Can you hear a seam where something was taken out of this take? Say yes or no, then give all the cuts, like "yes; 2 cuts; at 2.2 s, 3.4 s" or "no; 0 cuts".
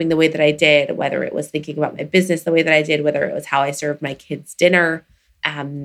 no; 0 cuts